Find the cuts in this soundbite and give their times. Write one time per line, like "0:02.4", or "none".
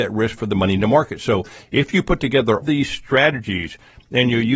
0:02.6